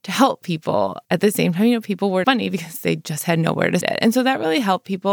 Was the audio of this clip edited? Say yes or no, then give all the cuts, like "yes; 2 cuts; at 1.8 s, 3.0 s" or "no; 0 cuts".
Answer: yes; 3 cuts; at 1.0 s, 2.2 s, 3.8 s